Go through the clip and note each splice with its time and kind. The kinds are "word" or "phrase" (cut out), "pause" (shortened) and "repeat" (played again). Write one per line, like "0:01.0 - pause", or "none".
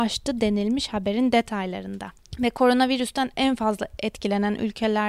none